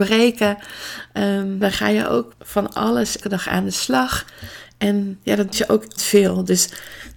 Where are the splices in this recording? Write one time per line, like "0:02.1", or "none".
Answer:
0:01.6
0:02.3
0:03.2
0:05.5
0:06.0